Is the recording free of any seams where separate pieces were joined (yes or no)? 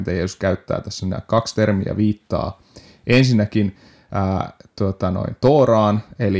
yes